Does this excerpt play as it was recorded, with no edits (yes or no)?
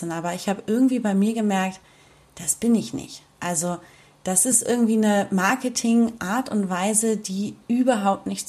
yes